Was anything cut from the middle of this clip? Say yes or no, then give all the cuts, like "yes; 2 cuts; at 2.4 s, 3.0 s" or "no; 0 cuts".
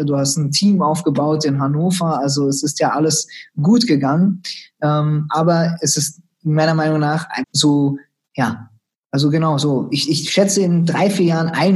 yes; 1 cut; at 7.4 s